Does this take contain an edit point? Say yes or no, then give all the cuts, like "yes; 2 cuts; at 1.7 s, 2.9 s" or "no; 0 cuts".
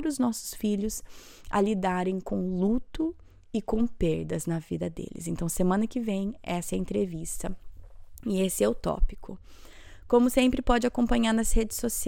no; 0 cuts